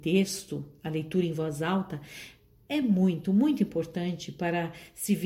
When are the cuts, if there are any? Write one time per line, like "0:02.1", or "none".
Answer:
none